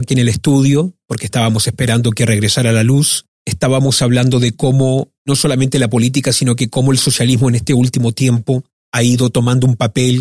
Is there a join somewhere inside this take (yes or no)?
yes